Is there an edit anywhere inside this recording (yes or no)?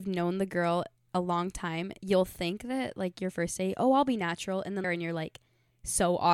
yes